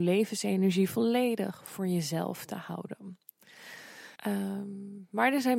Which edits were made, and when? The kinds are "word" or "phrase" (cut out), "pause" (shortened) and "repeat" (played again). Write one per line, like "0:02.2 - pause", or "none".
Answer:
0:04.1 - pause